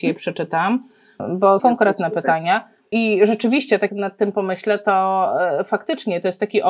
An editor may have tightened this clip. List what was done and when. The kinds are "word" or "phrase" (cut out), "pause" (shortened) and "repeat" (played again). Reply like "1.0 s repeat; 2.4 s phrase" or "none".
1.6 s phrase; 3.9 s word